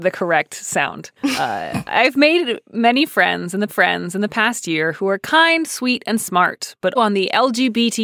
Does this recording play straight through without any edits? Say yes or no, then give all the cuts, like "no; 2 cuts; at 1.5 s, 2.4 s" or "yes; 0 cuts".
no; 3 cuts; at 1.2 s, 3.7 s, 7.0 s